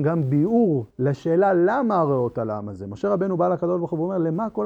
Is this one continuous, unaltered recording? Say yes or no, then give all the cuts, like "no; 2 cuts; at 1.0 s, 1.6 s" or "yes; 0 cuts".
no; 1 cut; at 0.9 s